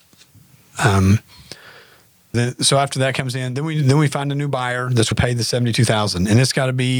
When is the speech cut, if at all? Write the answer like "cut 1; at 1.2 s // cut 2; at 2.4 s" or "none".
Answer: cut 1; at 2.3 s // cut 2; at 5.1 s